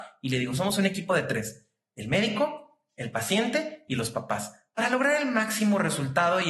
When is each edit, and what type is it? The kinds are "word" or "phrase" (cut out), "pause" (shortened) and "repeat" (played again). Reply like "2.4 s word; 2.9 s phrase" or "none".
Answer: none